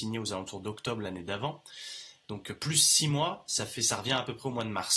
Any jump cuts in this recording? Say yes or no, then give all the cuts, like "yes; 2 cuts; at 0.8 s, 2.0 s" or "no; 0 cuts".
no; 0 cuts